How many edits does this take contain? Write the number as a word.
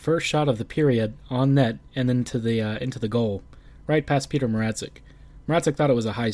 zero